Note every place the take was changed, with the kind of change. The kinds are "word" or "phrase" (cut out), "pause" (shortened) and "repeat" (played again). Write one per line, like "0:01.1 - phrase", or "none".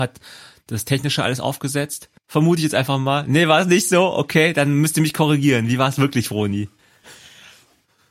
0:02.2 - pause